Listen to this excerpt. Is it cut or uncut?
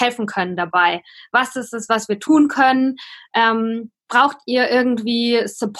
uncut